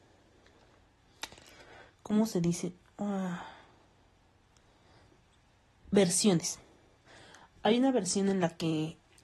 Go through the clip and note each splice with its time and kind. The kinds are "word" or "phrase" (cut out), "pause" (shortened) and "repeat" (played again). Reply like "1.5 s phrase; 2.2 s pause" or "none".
none